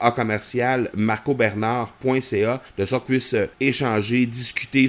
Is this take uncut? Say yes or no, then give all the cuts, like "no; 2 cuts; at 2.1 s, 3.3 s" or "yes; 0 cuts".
no; 3 cuts; at 2.7 s, 3.1 s, 3.5 s